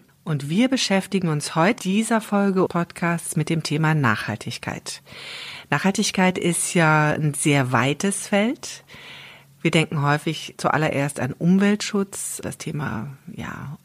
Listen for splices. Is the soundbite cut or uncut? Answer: cut